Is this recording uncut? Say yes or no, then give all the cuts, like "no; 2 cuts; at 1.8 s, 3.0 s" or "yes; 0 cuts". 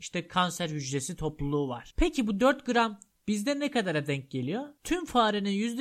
yes; 0 cuts